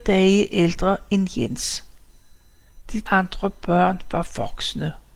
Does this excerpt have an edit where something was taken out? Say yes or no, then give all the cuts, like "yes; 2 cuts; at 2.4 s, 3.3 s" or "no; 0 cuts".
yes; 1 cut; at 3.1 s